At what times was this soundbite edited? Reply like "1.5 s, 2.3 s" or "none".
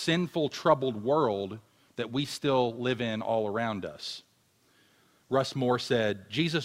none

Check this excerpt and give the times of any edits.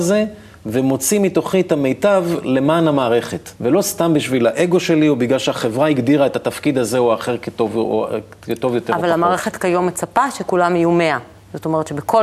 3.6 s

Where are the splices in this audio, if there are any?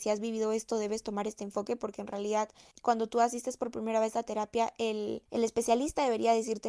5.2 s

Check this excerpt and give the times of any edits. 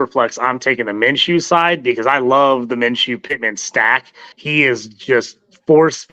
4.3 s

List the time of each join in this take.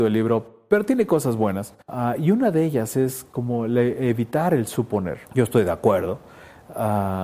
1.8 s, 5.3 s

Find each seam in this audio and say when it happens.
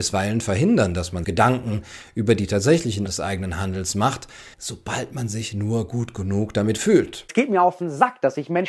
1.2 s, 3.1 s, 4.5 s

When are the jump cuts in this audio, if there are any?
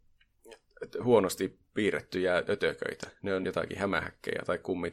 none

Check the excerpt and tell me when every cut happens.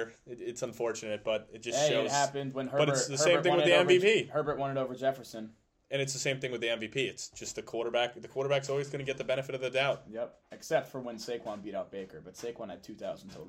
none

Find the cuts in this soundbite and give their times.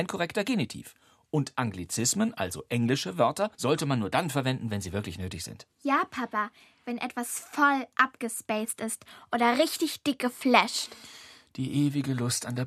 3.5 s, 5.7 s

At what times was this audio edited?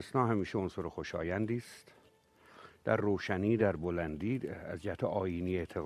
none

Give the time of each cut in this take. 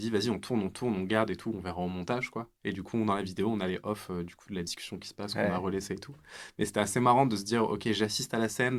none

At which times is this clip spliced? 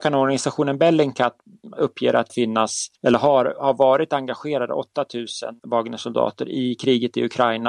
2.3 s, 3.0 s, 5.6 s

